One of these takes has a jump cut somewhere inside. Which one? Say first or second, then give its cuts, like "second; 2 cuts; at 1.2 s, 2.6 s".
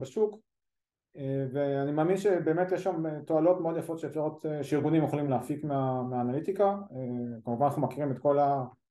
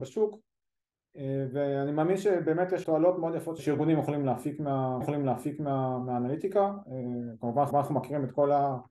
second; 4 cuts; at 2.8 s, 3.6 s, 5.0 s, 7.7 s